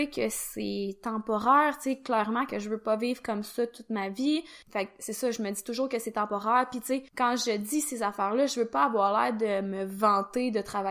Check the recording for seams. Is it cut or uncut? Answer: cut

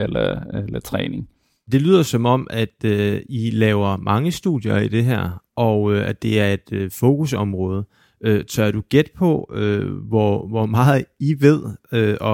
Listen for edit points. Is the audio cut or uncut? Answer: uncut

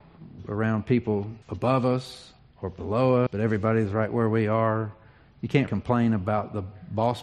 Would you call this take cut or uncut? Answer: cut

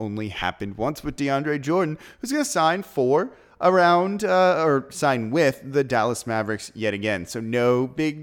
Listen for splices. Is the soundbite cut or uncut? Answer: uncut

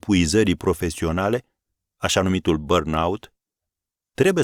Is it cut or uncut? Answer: uncut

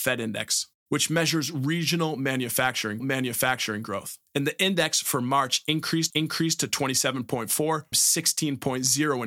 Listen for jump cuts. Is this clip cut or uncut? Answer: cut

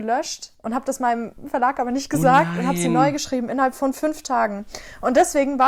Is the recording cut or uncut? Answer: uncut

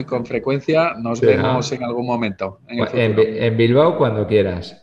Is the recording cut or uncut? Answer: uncut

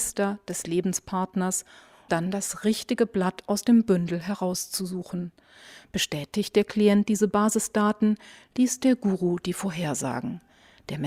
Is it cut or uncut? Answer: cut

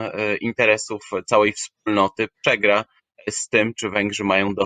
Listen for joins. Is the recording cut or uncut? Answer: uncut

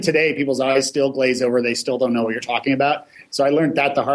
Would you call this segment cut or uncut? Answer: uncut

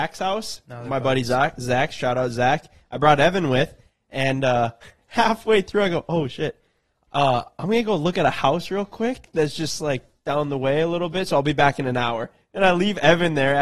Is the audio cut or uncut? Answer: uncut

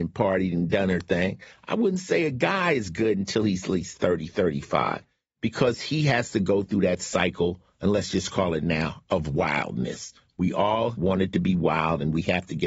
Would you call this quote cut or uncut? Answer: uncut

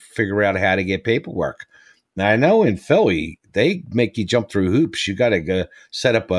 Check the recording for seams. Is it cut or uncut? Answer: uncut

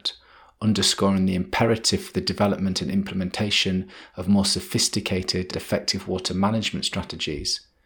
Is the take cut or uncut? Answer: cut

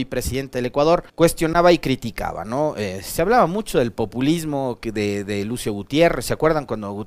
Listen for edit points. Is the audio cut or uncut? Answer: cut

